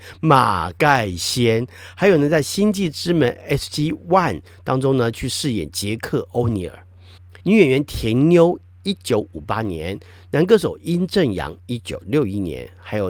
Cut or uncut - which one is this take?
cut